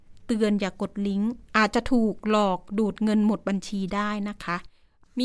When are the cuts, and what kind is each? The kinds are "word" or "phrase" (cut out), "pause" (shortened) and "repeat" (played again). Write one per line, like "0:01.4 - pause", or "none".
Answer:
0:01.4 - pause